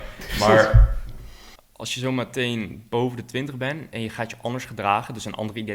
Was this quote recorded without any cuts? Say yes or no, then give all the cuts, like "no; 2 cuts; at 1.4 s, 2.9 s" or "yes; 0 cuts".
yes; 0 cuts